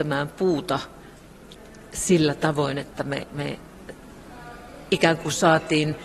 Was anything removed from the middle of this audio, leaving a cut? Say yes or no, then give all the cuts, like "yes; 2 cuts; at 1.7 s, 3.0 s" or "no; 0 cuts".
no; 0 cuts